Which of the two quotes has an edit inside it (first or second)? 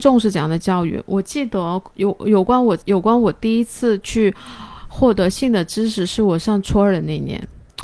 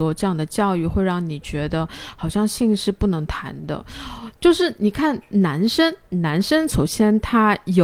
first